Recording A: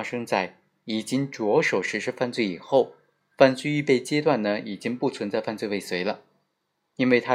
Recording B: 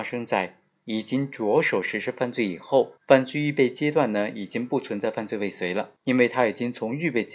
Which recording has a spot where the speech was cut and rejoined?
B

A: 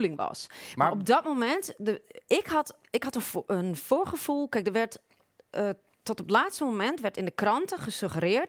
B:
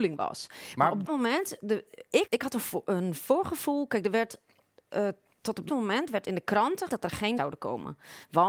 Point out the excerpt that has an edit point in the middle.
B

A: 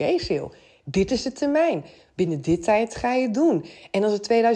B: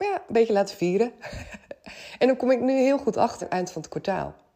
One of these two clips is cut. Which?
B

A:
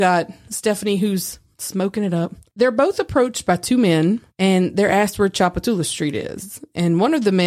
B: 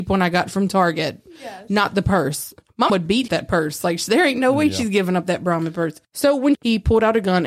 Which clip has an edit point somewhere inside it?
B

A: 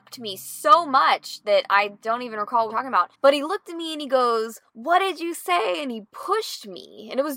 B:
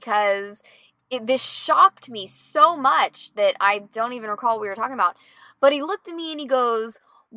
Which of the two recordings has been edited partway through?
A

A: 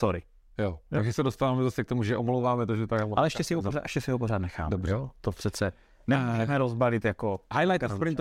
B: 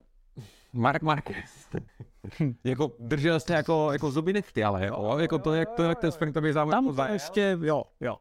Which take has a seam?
B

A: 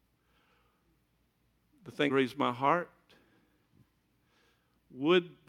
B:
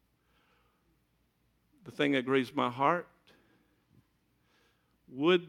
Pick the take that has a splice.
A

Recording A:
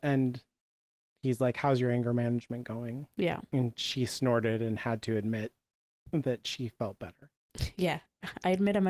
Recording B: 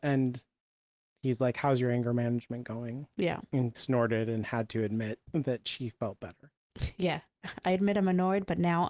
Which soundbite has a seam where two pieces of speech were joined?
B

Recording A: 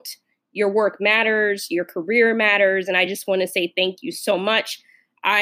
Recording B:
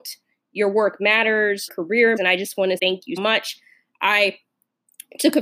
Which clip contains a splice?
B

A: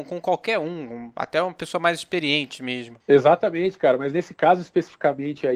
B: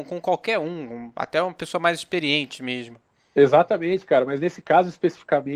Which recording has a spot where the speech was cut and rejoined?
A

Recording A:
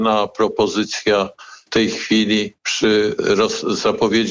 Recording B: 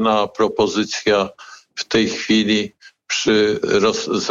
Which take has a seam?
A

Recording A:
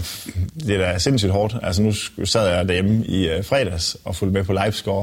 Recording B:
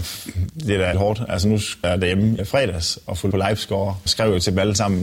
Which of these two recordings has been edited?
B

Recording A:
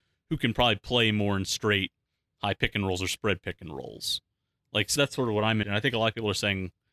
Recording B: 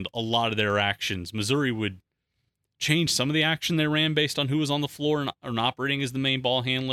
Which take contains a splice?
A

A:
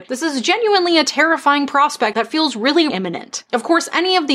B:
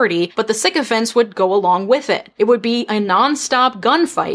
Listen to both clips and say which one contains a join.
A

